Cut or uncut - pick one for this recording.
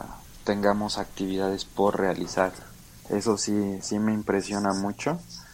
uncut